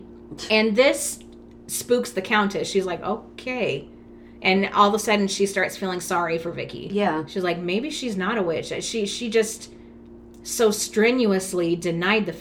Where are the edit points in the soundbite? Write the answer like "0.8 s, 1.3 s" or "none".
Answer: none